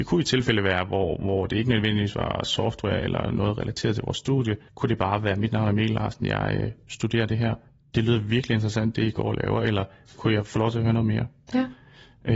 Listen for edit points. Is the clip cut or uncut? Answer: cut